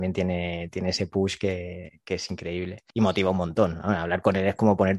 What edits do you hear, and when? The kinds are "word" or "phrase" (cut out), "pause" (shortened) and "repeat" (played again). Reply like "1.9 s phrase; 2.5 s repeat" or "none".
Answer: 2.9 s pause